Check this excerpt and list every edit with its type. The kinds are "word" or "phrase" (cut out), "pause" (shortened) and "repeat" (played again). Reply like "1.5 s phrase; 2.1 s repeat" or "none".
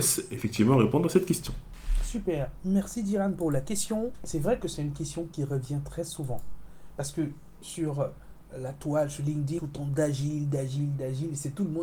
4.1 s pause; 9.6 s phrase